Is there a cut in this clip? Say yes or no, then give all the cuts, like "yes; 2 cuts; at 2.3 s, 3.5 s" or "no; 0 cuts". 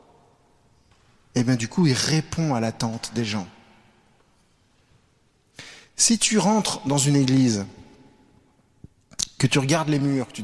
no; 0 cuts